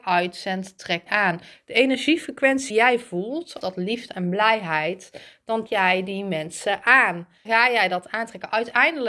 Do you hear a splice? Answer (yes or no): yes